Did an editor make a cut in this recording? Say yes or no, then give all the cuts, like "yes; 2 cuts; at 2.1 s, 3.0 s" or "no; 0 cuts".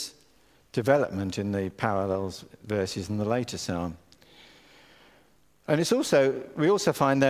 no; 0 cuts